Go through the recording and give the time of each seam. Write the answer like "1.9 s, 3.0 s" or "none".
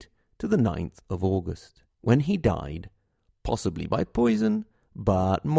1.9 s